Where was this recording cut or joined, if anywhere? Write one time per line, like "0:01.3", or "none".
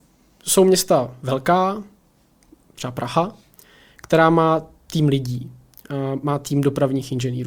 none